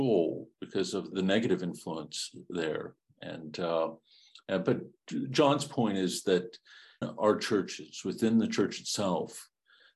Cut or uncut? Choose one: cut